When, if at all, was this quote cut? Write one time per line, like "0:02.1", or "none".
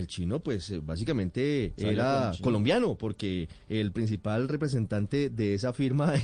none